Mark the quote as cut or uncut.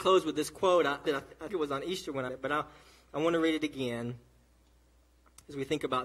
cut